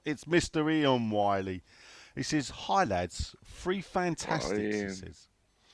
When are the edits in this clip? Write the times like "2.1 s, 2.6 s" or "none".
none